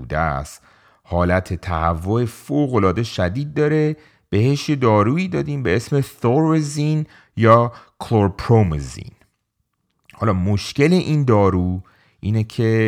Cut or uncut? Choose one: uncut